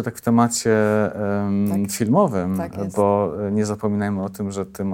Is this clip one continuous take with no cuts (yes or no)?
yes